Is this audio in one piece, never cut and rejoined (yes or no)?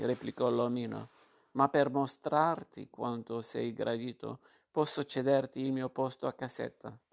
yes